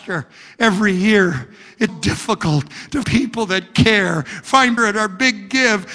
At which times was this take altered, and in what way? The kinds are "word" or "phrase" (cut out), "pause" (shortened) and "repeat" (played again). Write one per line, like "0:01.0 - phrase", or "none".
0:01.9 - word
0:03.0 - word
0:04.8 - phrase